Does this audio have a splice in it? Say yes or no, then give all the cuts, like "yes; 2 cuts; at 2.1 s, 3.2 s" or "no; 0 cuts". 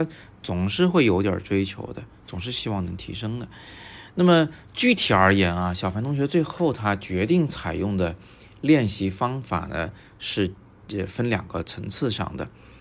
no; 0 cuts